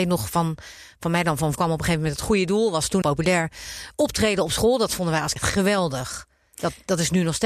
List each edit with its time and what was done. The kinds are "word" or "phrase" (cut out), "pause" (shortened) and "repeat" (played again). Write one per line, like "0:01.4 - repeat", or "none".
0:01.5 - word
0:03.0 - word
0:05.4 - word